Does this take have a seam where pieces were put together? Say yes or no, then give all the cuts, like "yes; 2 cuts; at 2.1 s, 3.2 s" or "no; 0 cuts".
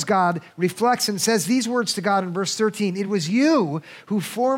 no; 0 cuts